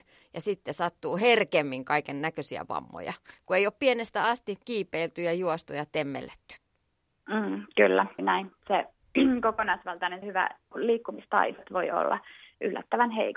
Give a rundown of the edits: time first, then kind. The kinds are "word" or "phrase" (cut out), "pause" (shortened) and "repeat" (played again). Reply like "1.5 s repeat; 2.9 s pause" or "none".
4.6 s pause; 8.2 s word; 10.2 s word; 10.7 s word